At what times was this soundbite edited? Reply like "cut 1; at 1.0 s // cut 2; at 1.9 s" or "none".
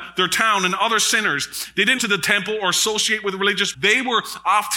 cut 1; at 2.0 s // cut 2; at 3.7 s